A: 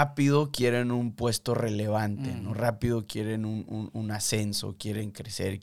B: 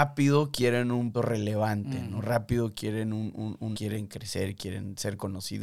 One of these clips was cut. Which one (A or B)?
B